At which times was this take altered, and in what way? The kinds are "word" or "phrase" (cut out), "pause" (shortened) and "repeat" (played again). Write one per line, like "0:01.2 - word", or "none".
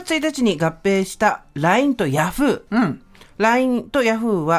none

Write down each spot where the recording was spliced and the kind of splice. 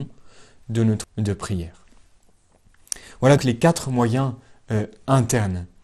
0:01.0 - word
0:03.4 - word

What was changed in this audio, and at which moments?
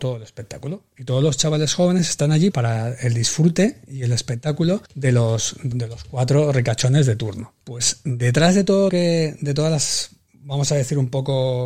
0:02.5 - word
0:04.9 - pause
0:05.7 - word
0:07.6 - pause
0:08.9 - word

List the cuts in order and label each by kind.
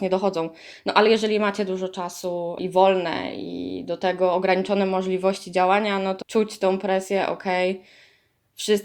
0:06.2 - word

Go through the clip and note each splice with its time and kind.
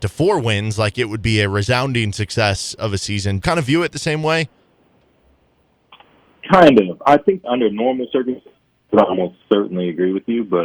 0:03.4 - word
0:07.4 - word

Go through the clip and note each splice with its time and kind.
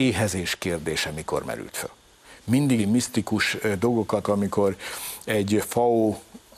0:02.8 - phrase
0:04.2 - word

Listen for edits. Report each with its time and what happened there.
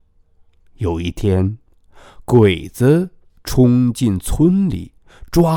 none

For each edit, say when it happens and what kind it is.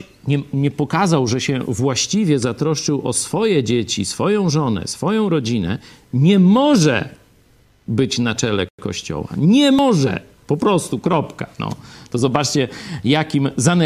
none

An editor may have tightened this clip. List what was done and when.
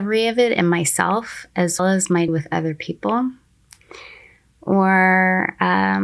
0:01.8 - word
0:02.3 - word

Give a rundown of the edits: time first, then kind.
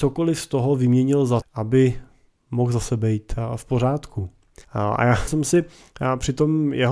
0:01.4 - word
0:04.6 - pause
0:05.3 - phrase

